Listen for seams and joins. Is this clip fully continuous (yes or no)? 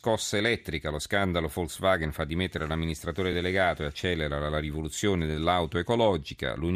yes